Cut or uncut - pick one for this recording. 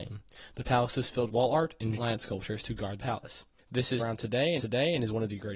cut